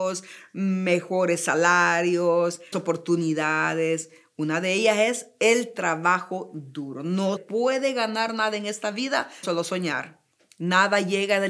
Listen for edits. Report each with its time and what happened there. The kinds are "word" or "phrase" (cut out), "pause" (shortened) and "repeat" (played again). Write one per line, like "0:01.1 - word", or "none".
0:02.7 - word
0:07.4 - word
0:09.4 - word